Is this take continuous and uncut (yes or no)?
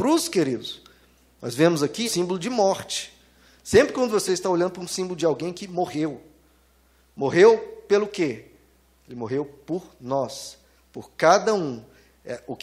no